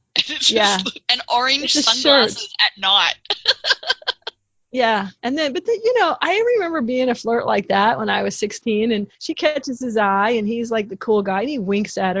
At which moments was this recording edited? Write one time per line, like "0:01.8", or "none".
0:05.2
0:09.1